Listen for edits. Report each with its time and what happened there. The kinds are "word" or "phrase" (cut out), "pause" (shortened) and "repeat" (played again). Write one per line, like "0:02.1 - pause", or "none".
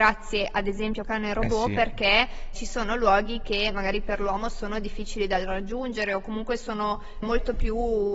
0:01.0 - word
0:02.5 - word
0:07.2 - word

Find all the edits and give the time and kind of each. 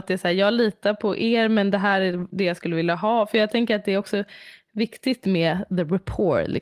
none

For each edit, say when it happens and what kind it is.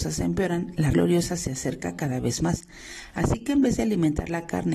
0:00.9 - word

